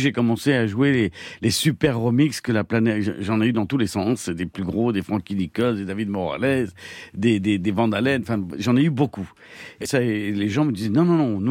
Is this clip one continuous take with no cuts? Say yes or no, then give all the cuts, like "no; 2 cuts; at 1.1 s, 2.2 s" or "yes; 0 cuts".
no; 1 cut; at 9.9 s